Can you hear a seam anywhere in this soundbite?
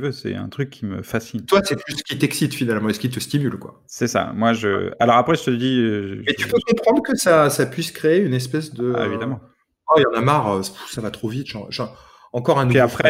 no; 0 cuts

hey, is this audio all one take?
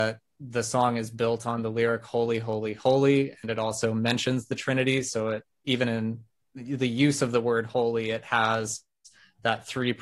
yes; 0 cuts

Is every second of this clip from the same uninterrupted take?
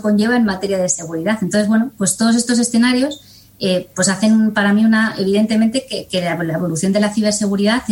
yes; 0 cuts

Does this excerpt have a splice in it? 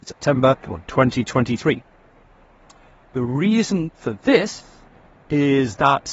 no; 0 cuts

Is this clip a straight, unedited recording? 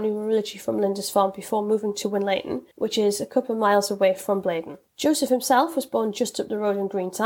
no; 2 cuts; at 2.7 s, 4.9 s

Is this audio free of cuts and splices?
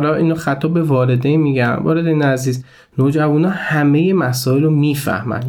yes; 0 cuts

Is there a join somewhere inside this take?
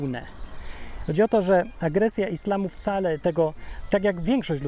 no; 0 cuts

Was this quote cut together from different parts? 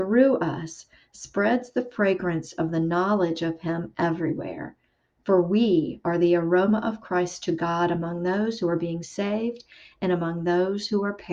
no; 0 cuts

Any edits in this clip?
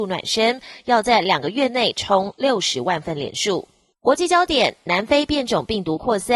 yes; 1 cut; at 3.9 s

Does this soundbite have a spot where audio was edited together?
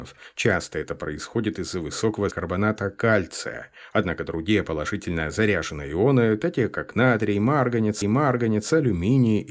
yes; 2 cuts; at 2.3 s, 8.0 s

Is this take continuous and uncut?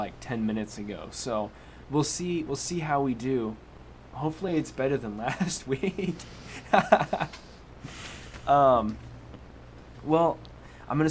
yes; 0 cuts

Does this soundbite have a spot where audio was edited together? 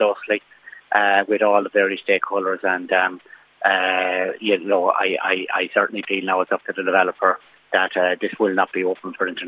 no; 0 cuts

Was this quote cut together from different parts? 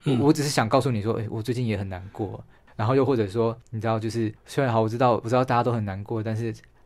no; 0 cuts

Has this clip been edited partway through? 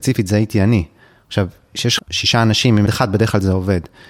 yes; 2 cuts; at 2.0 s, 2.9 s

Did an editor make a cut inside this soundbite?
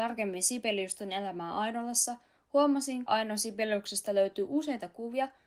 yes; 1 cut; at 3.1 s

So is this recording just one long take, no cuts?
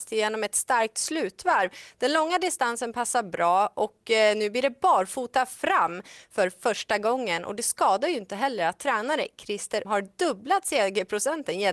no; 1 cut; at 9.8 s

